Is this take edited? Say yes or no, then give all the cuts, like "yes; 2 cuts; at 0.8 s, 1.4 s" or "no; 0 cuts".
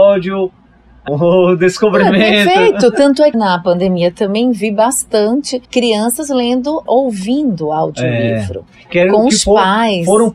yes; 4 cuts; at 1.1 s, 3.3 s, 5.6 s, 6.9 s